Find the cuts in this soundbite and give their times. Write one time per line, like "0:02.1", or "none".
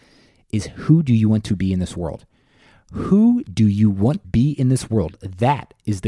0:04.2